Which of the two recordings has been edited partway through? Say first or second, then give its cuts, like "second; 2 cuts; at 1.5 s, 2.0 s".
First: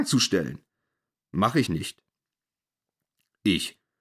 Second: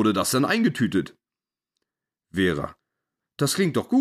first; 1 cut; at 1.7 s